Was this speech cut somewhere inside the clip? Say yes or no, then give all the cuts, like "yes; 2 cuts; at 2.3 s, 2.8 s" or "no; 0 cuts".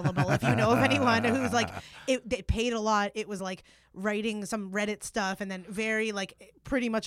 no; 0 cuts